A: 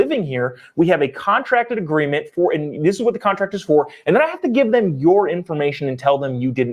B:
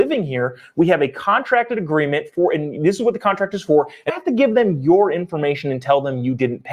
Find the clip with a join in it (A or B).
B